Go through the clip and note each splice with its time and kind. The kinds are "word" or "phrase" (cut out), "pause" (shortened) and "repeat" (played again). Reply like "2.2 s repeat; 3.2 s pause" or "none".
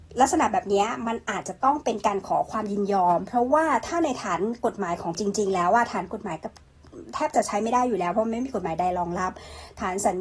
5.2 s word